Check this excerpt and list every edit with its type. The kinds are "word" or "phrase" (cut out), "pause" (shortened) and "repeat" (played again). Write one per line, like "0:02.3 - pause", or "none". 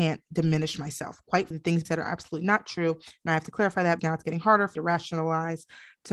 0:01.5 - word
0:01.9 - word
0:04.0 - word
0:04.8 - word